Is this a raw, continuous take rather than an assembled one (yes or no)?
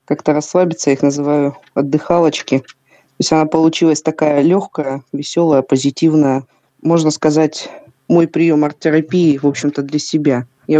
yes